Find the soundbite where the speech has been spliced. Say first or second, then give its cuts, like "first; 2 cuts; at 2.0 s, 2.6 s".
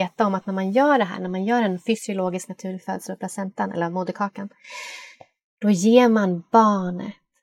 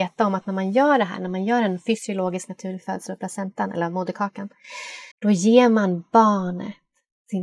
second; 1 cut; at 5.1 s